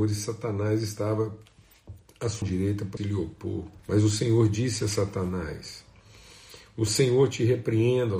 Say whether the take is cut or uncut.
cut